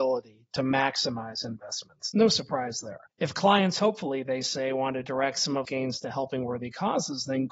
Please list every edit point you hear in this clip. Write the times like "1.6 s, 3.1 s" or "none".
3.1 s, 5.6 s